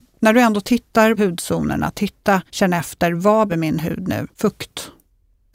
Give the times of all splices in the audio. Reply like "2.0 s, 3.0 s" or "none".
1.2 s, 2.5 s, 3.5 s, 4.3 s